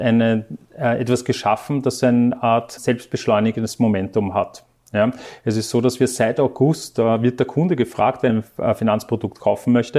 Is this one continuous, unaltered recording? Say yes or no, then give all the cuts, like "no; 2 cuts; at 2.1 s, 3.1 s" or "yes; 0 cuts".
no; 2 cuts; at 2.8 s, 8.3 s